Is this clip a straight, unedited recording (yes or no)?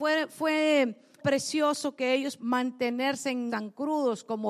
no